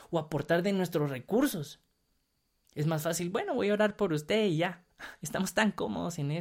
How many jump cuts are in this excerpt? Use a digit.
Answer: 0